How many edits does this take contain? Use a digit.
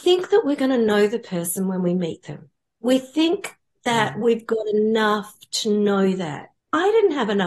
0